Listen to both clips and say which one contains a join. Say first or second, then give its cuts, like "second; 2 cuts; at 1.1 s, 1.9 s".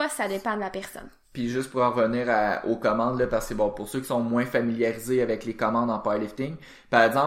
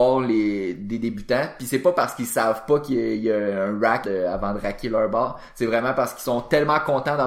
second; 1 cut; at 4.0 s